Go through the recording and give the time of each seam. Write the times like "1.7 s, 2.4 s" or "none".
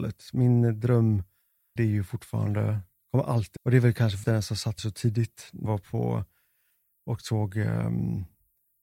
1.8 s, 3.6 s, 4.2 s, 4.8 s, 5.7 s